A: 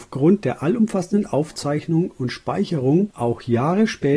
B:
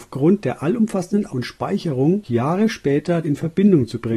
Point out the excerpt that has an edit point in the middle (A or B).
B